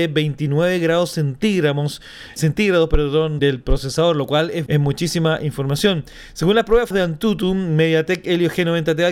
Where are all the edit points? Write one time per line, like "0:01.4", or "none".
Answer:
0:02.4
0:03.4
0:04.7
0:06.9